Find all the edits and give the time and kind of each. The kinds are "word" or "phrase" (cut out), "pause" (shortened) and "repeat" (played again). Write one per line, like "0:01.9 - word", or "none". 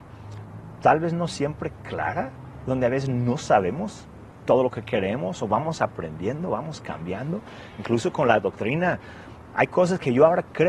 none